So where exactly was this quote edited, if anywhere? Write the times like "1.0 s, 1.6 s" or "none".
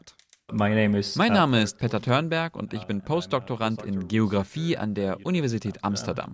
none